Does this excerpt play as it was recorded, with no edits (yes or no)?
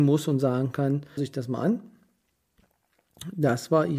no